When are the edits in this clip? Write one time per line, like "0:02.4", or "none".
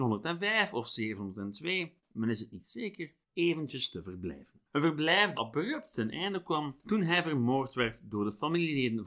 0:02.0
0:03.2
0:04.7
0:05.3
0:06.8